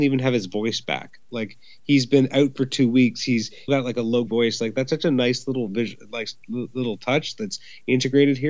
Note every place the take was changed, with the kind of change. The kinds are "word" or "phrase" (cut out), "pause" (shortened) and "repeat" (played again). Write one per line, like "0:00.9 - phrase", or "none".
0:03.7 - word
0:04.3 - word